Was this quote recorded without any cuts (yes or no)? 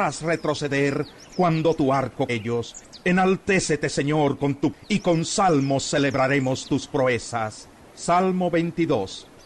no